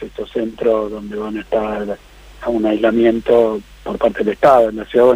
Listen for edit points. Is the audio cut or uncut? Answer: uncut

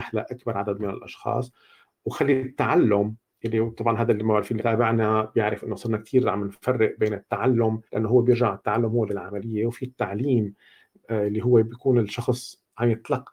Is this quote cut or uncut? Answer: cut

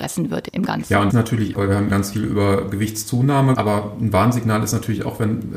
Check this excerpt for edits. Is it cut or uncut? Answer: cut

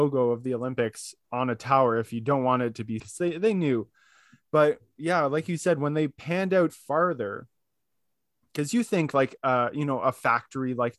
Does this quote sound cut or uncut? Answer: cut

